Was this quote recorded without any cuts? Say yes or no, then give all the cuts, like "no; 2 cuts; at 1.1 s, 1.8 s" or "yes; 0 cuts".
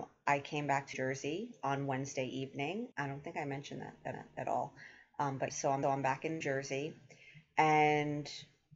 no; 6 cuts; at 0.9 s, 2.9 s, 4.1 s, 5.5 s, 5.8 s, 6.4 s